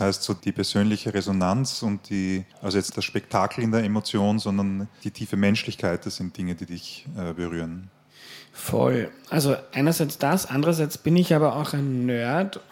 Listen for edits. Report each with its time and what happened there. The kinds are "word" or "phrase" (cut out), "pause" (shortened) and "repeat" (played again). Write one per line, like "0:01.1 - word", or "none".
0:02.5 - pause
0:02.9 - word
0:05.0 - word